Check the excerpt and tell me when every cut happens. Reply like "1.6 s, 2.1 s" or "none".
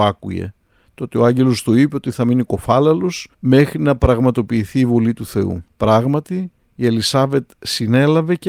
3.3 s, 5.7 s